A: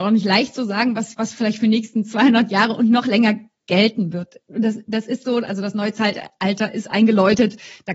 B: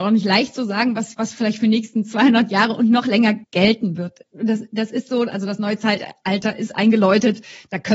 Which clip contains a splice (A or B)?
B